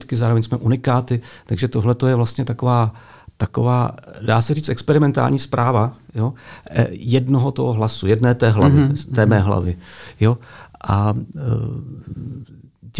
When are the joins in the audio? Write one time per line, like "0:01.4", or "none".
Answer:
none